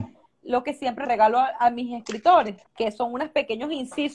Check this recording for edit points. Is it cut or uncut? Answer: cut